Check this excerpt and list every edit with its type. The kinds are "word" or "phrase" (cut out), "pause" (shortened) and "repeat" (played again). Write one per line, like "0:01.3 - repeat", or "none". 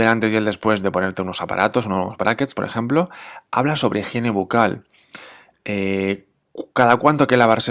none